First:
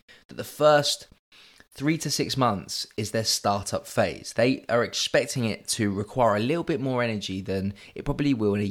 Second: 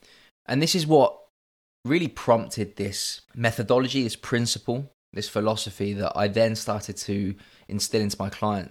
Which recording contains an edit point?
second; 1 cut; at 3.3 s

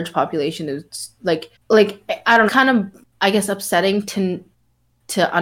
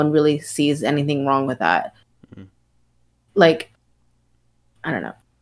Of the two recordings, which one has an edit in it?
first; 3 cuts; at 1.5 s, 2.5 s, 3.1 s

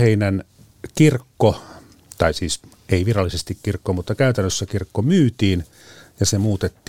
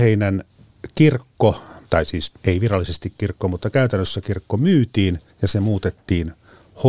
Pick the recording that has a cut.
second; 3 cuts; at 1.8 s, 2.4 s, 5.3 s

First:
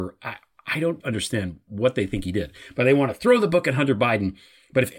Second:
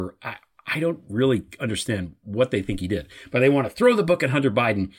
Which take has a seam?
first; 1 cut; at 1.0 s

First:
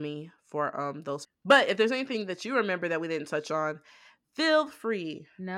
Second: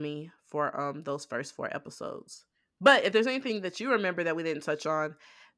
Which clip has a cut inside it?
first; 1 cut; at 1.2 s

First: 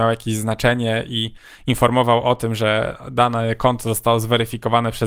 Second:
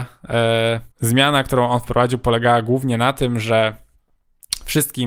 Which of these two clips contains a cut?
second; 1 cut; at 0.9 s

